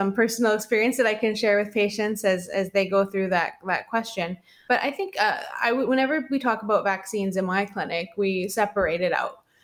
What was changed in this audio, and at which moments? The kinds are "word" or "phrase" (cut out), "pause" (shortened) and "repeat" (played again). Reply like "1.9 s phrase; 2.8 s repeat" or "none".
none